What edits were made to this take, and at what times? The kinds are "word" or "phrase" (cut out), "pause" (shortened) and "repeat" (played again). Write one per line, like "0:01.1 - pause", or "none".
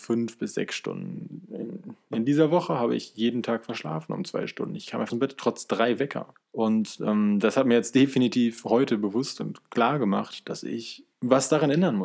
0:05.1 - phrase
0:06.3 - pause
0:11.1 - pause